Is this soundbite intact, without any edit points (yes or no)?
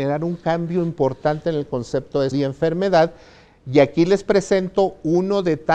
no